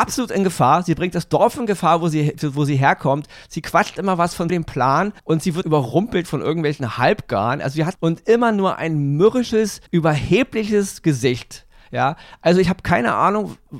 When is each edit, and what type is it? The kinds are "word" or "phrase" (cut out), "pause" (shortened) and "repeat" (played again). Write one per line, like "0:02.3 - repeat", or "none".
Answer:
0:04.5 - phrase
0:05.2 - pause
0:05.6 - word
0:07.9 - phrase
0:09.9 - pause